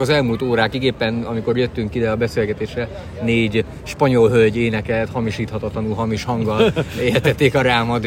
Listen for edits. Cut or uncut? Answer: uncut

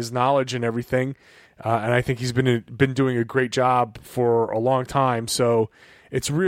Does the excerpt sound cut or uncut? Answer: uncut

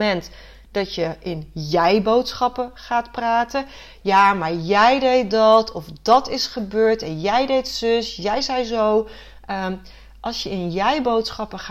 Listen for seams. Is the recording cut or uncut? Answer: uncut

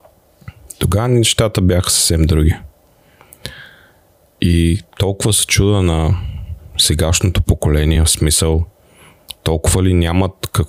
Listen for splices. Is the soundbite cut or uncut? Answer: uncut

